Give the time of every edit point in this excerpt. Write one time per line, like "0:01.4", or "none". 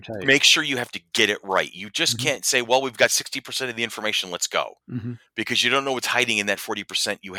0:04.8